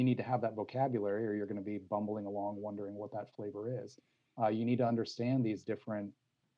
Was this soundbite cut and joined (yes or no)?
no